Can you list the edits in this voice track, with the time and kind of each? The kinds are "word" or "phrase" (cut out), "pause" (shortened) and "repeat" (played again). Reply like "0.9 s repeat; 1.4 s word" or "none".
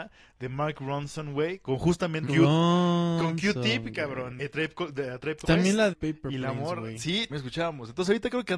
2.3 s word; 4.4 s word; 5.4 s word; 5.9 s word; 7.3 s word